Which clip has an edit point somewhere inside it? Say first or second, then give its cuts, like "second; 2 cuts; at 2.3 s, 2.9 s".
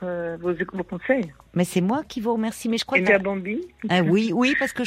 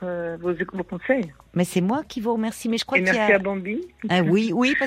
first; 1 cut; at 3.1 s